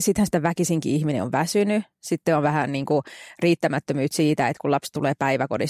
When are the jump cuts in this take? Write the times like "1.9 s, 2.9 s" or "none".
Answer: none